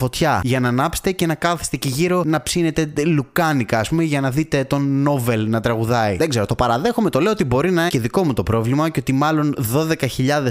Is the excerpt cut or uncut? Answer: cut